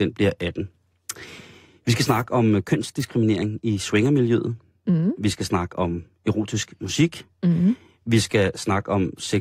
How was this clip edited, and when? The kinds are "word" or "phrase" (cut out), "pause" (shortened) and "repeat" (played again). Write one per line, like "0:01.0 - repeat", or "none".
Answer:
none